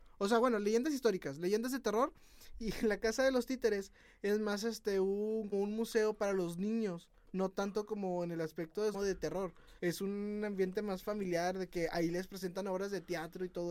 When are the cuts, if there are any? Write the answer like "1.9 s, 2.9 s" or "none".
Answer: 5.5 s, 8.9 s, 9.8 s